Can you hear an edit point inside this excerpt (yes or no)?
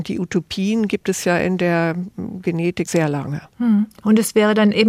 yes